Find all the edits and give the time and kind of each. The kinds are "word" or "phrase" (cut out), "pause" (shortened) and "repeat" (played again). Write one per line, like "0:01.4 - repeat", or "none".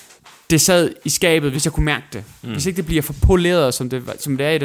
none